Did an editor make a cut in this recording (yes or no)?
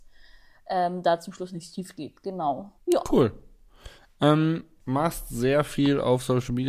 yes